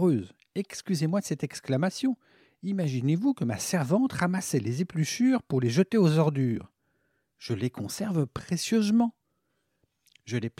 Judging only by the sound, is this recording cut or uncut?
uncut